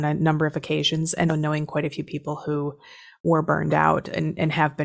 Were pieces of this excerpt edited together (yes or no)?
yes